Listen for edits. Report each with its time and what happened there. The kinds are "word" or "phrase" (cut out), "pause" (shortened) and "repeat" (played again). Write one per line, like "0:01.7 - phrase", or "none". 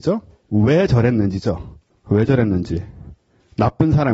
0:01.9 - pause